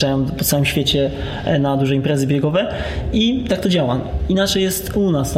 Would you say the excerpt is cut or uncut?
uncut